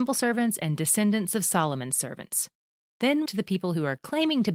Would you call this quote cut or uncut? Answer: cut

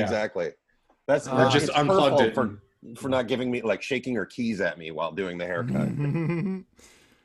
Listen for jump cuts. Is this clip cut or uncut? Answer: uncut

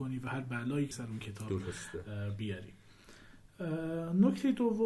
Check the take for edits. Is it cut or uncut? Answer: cut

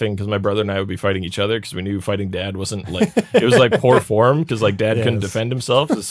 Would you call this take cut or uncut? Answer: uncut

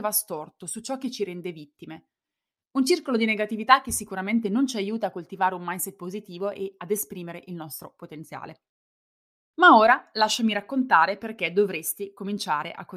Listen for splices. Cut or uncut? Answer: uncut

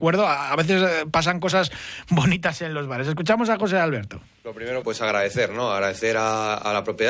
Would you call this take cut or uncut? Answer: cut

